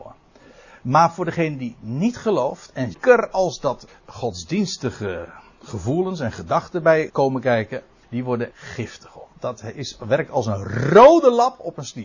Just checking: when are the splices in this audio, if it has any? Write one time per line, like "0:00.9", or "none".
0:02.9
0:03.9
0:07.1
0:08.0
0:08.5
0:09.3